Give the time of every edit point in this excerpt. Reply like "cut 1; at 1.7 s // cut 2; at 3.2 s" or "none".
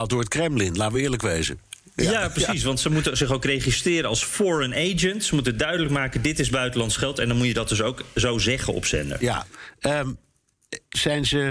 none